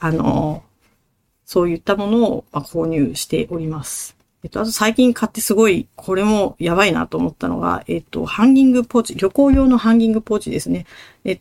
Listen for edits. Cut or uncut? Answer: cut